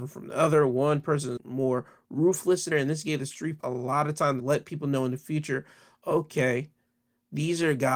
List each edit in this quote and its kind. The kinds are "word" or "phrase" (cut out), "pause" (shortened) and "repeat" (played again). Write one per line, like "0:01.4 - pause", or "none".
0:01.4 - word
0:02.7 - word
0:03.6 - word
0:04.4 - word